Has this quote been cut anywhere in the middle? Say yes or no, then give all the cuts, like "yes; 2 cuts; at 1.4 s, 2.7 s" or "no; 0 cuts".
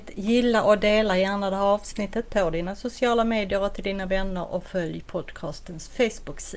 no; 0 cuts